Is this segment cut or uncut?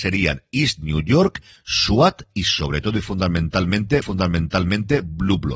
cut